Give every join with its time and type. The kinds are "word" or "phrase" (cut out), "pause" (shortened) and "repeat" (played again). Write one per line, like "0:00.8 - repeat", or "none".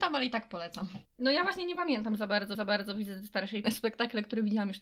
0:02.5 - repeat
0:03.6 - phrase